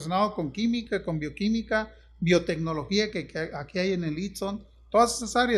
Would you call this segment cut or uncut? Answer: uncut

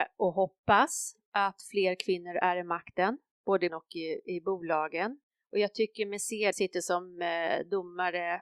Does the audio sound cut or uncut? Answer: cut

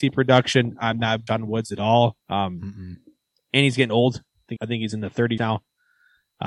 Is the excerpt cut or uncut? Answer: cut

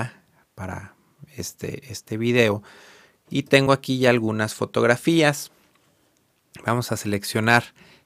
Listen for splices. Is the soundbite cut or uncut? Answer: uncut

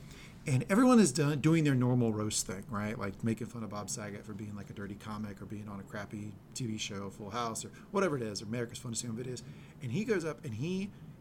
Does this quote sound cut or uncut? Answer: uncut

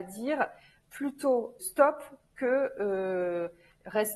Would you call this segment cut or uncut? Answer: cut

